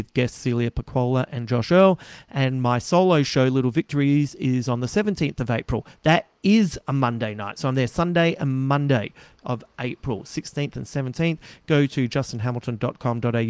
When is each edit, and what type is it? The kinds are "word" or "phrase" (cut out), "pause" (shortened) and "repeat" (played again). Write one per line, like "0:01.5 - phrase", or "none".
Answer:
none